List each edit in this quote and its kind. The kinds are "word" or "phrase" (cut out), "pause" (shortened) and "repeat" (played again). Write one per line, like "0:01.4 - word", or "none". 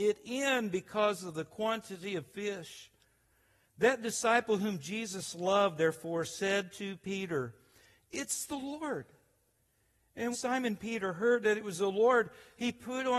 0:10.3 - word

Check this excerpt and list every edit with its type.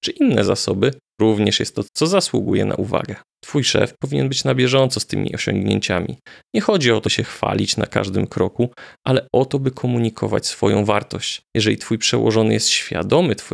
0:01.2 - word
0:01.8 - word
0:03.3 - pause
0:07.0 - word
0:11.5 - pause

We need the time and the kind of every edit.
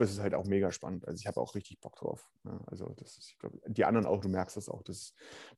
none

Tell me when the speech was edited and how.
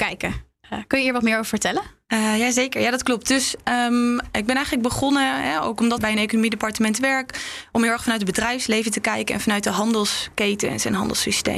0:06.0 - phrase

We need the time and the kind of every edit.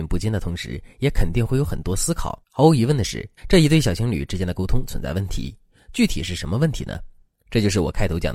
0:02.4 - pause
0:03.4 - pause

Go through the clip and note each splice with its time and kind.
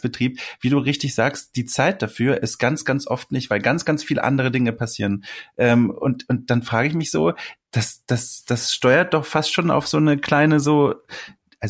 none

